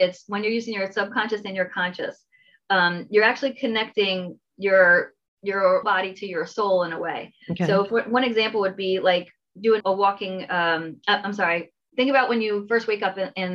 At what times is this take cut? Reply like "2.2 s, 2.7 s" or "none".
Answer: 5.8 s, 7.4 s, 9.8 s